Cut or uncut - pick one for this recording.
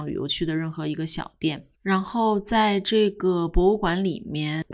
cut